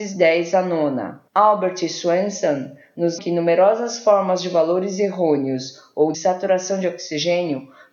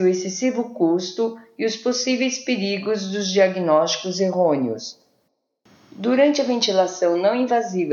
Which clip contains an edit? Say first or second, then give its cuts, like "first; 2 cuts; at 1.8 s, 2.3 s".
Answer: first; 3 cuts; at 1.3 s, 3.2 s, 6.1 s